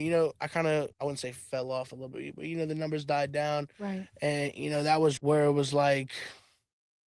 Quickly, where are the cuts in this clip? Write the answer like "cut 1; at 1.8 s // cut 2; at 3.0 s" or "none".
cut 1; at 0.9 s // cut 2; at 5.2 s